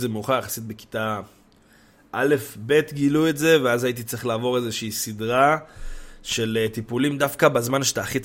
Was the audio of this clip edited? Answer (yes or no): no